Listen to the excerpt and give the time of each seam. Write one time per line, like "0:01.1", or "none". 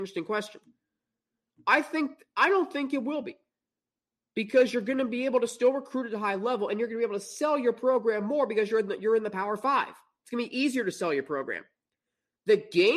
none

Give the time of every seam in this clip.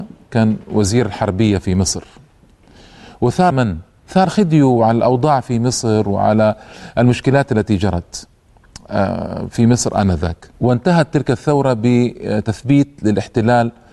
0:03.5
0:04.3
0:10.5

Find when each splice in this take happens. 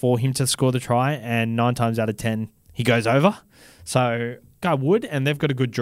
0:02.6
0:04.6

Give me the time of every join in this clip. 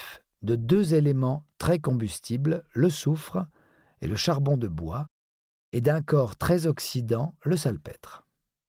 none

